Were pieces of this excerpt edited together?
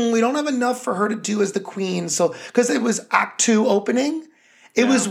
no; 0 cuts

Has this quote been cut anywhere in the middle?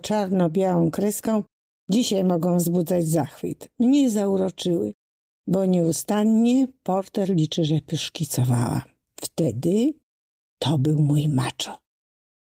no; 0 cuts

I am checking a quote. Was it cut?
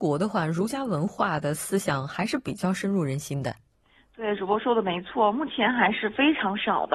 yes; 1 cut; at 3.7 s

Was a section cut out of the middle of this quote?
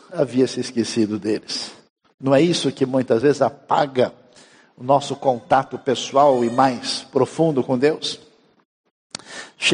no; 0 cuts

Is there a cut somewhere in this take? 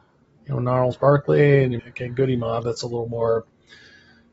yes; 1 cut; at 1.8 s

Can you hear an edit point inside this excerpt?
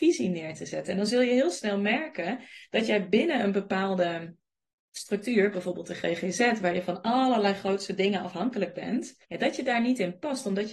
yes; 1 cut; at 9.2 s

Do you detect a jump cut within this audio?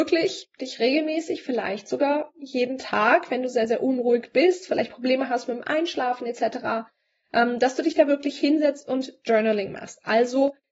no; 0 cuts

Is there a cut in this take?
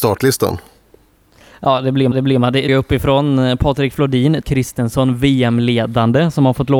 yes; 3 cuts; at 2.1 s, 2.7 s, 4.4 s

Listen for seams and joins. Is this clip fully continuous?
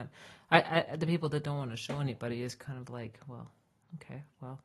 yes; 0 cuts

